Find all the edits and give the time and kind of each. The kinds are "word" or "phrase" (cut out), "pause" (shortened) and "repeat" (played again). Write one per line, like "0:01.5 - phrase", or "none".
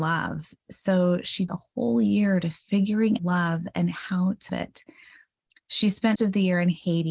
0:01.5 - word
0:03.2 - word
0:04.5 - word
0:06.2 - word